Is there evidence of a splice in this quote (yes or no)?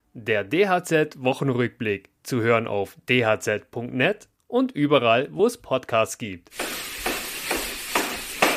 no